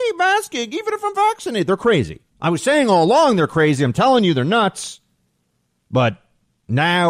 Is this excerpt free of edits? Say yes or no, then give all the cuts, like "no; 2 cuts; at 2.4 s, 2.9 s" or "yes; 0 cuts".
no; 1 cut; at 2.3 s